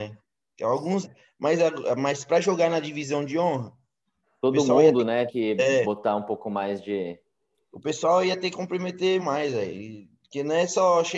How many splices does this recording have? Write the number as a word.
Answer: four